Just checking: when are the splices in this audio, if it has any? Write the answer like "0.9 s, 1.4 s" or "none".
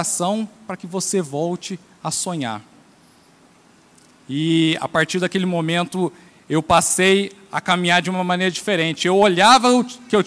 none